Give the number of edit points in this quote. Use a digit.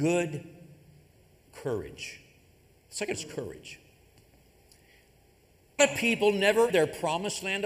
3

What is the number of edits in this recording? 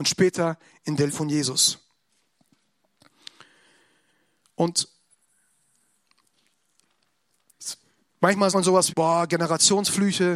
3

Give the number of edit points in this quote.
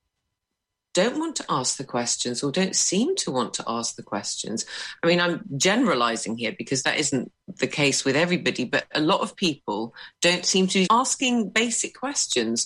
2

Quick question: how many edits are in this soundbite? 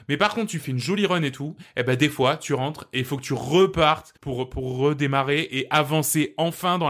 1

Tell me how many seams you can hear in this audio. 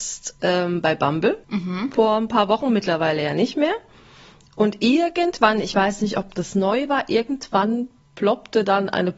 1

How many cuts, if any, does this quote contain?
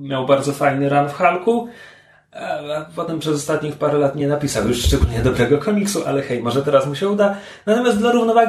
0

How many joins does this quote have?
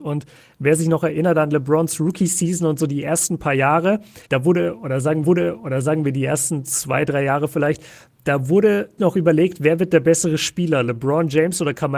3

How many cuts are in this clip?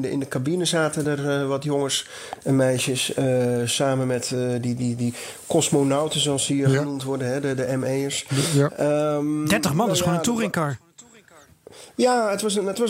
0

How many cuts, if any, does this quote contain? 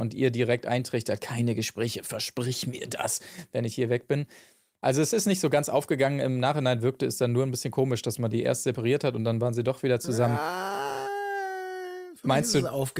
0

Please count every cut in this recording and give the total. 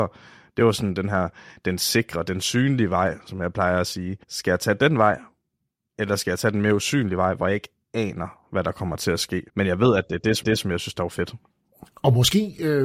3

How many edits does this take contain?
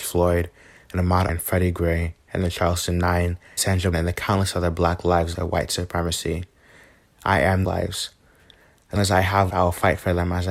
7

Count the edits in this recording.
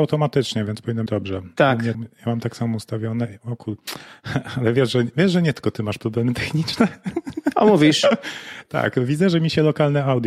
2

